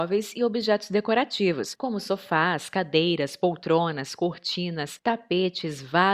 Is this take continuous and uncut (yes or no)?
yes